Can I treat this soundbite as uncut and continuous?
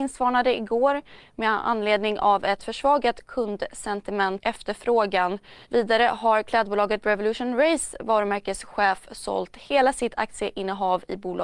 no; 2 cuts; at 4.4 s, 5.6 s

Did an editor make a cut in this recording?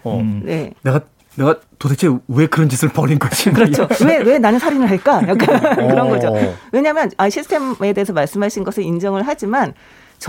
no; 0 cuts

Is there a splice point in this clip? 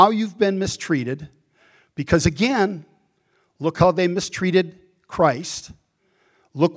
no; 0 cuts

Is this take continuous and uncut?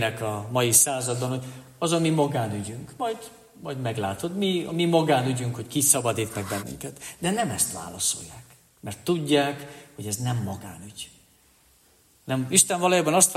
yes; 0 cuts

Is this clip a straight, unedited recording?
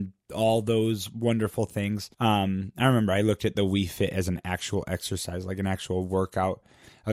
no; 1 cut; at 2.1 s

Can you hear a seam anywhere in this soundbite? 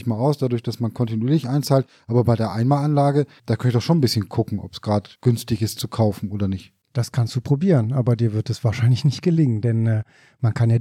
yes; 2 cuts; at 5.2 s, 6.8 s

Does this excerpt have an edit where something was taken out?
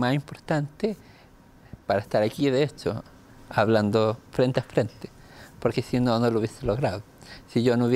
yes; 2 cuts; at 1.8 s, 4.3 s

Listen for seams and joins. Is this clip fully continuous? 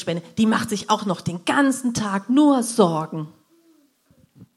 yes; 0 cuts

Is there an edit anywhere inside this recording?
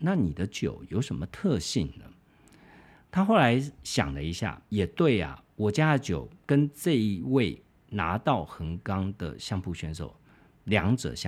yes; 1 cut; at 4.7 s

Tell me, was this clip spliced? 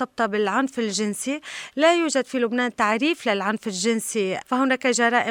no; 0 cuts

